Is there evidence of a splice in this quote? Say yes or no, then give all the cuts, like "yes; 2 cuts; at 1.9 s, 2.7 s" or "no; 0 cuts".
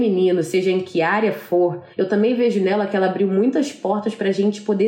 yes; 1 cut; at 1.9 s